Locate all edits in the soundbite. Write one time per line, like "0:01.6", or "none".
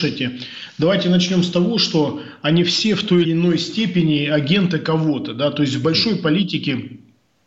0:03.2